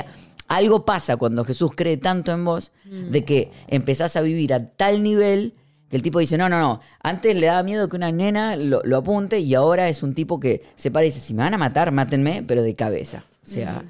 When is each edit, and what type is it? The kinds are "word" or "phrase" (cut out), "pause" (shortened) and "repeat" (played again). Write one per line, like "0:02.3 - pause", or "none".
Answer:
none